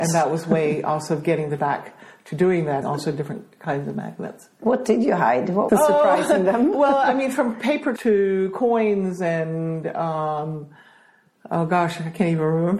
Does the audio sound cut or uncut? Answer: cut